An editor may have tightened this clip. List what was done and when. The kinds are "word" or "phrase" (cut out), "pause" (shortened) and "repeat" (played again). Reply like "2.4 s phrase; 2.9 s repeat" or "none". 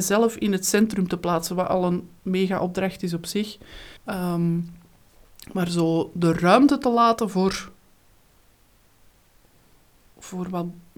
4.0 s pause